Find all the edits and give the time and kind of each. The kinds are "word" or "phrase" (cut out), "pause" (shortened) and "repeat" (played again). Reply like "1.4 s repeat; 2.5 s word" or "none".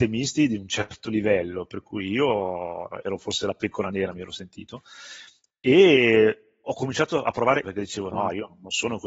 7.6 s word